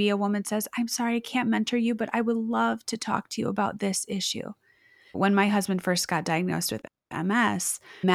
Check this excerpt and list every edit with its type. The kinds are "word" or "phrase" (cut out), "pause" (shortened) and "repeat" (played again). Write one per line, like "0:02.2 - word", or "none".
none